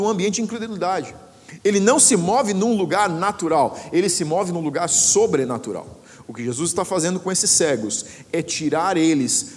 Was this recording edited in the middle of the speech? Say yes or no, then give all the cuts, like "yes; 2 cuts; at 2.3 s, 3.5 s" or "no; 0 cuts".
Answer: no; 0 cuts